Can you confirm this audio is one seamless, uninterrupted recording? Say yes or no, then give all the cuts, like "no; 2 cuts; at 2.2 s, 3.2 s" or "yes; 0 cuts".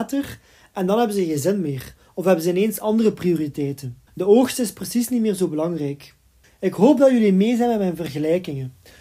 no; 2 cuts; at 4.1 s, 6.4 s